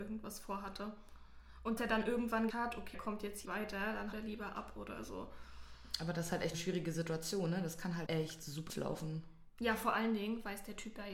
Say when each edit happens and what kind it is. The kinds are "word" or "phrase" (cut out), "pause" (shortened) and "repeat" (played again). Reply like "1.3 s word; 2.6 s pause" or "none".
1.8 s word; 2.5 s word; 2.9 s word; 3.4 s word; 4.1 s word; 6.5 s word; 8.1 s word; 8.7 s word